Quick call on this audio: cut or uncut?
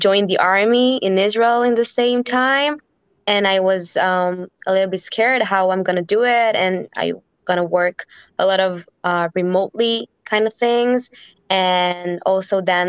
uncut